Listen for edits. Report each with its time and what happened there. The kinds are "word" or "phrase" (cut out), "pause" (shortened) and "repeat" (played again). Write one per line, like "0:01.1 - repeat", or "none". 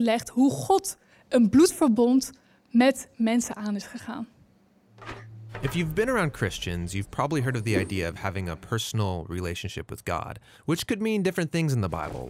none